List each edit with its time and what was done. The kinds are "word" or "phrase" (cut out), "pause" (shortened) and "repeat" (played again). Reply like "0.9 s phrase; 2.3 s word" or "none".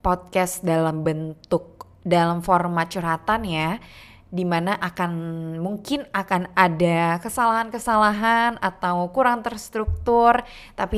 none